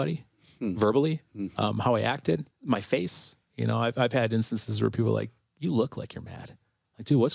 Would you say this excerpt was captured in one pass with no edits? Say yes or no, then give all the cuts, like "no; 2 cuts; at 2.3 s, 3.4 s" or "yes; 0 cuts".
no; 1 cut; at 2.5 s